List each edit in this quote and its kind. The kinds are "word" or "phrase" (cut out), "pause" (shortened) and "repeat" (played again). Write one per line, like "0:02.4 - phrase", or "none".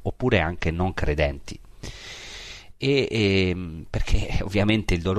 none